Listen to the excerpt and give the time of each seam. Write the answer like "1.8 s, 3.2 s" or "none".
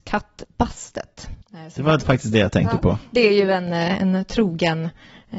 1.4 s

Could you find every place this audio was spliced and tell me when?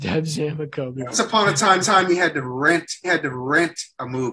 1.1 s, 1.8 s, 3.0 s

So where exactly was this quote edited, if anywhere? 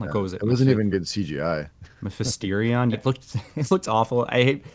0.9 s, 2.9 s

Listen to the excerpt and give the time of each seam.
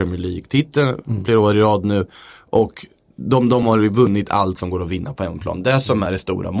none

